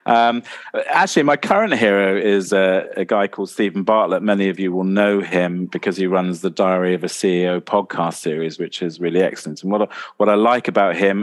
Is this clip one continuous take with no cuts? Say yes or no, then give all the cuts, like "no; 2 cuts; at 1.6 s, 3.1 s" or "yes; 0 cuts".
yes; 0 cuts